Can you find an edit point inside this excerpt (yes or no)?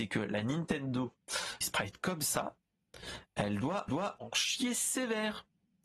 yes